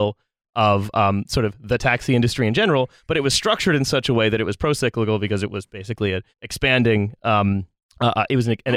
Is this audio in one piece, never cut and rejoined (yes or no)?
no